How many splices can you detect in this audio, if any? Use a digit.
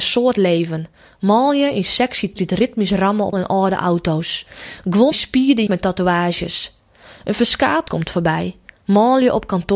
5